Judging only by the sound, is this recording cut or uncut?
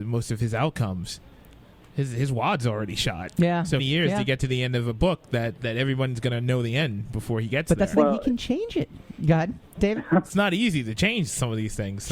cut